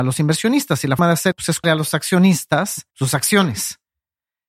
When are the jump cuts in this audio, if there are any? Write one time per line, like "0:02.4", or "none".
0:01.0
0:01.3
0:01.6
0:02.9